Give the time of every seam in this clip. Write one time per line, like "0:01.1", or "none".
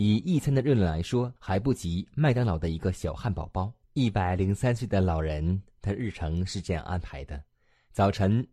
0:01.4
0:03.8